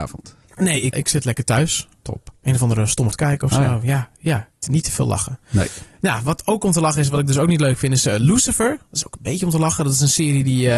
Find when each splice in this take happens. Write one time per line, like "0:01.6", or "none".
0:00.9
0:03.1
0:04.6

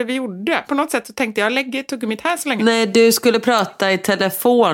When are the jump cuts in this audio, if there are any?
none

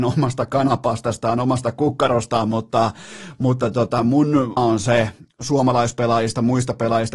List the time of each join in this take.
0:04.6

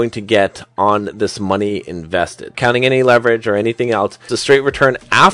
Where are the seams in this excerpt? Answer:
0:02.5
0:04.3

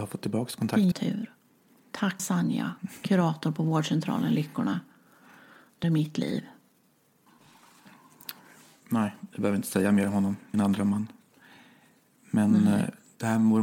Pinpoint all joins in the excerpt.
0:00.9
0:02.2
0:05.8
0:10.5

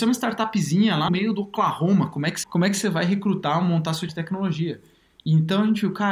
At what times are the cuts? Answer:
0:01.1
0:02.4
0:04.1

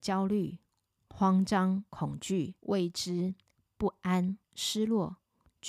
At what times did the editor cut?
0:01.9
0:02.6
0:04.4

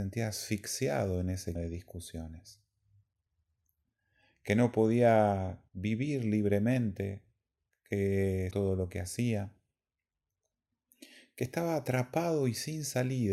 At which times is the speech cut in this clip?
0:01.6
0:05.7
0:08.5

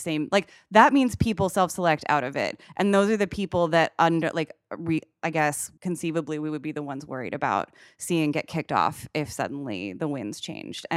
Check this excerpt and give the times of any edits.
0:05.8

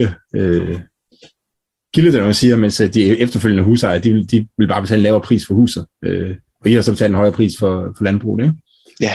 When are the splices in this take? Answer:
none

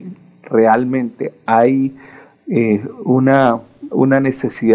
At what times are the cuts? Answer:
none

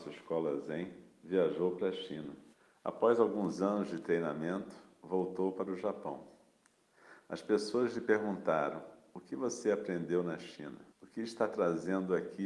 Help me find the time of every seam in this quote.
0:02.5
0:10.9

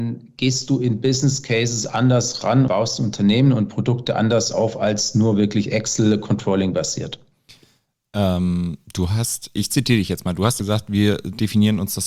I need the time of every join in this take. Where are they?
0:02.7
0:10.6

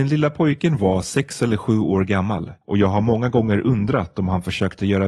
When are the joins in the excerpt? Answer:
0:02.6

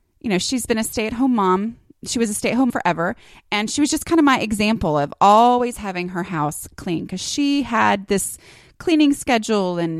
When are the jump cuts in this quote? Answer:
0:02.7

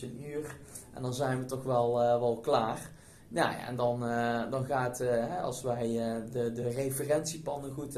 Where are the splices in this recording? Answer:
none

